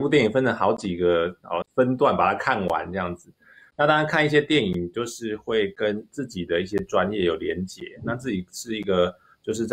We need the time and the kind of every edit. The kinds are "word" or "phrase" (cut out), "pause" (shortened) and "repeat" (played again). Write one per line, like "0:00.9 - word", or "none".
0:01.6 - word